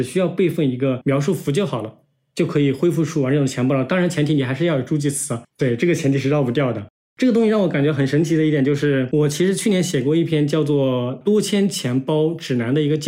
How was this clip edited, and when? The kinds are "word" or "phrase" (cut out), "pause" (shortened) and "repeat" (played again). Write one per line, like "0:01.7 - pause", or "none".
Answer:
none

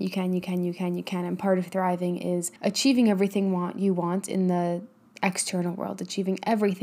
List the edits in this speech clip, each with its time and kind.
0:02.6 - pause

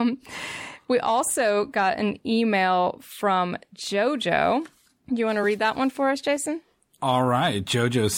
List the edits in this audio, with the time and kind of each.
none

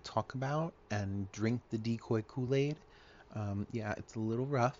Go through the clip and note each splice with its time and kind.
none

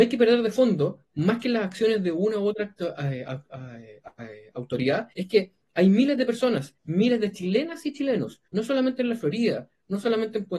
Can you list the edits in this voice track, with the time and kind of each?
0:05.1 - pause
0:06.8 - pause
0:08.5 - pause

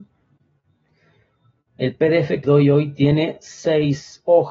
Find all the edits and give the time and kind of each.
0:02.4 - word

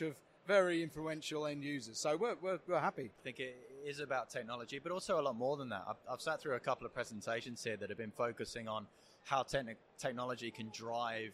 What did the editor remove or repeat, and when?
none

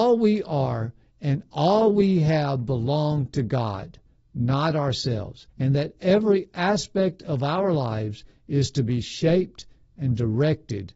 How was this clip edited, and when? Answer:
0:05.5 - pause

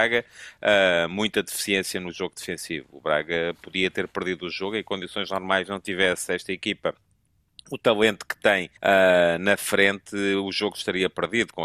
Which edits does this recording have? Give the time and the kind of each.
0:08.8 - pause

